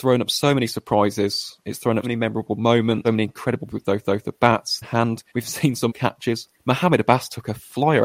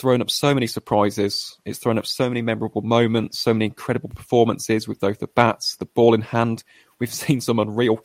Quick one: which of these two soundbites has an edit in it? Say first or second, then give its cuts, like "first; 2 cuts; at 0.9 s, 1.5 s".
first; 8 cuts; at 2.0 s, 3.0 s, 3.7 s, 4.0 s, 4.8 s, 5.3 s, 5.9 s, 6.5 s